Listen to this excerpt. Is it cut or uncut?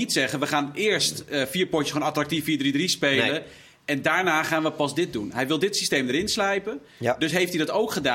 uncut